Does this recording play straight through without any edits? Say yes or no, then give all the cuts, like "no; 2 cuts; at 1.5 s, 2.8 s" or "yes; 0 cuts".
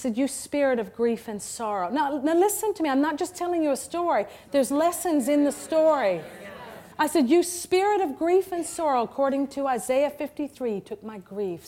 no; 1 cut; at 6.9 s